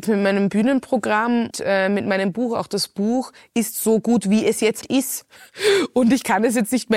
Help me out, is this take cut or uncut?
cut